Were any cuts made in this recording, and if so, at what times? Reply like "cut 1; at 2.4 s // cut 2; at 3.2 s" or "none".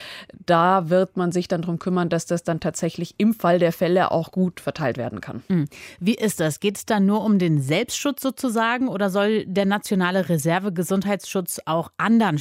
none